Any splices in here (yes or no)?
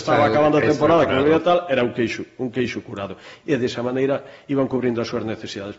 no